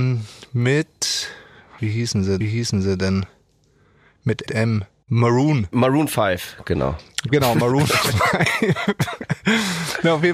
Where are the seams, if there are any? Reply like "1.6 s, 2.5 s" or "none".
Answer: 1.8 s, 2.4 s, 4.5 s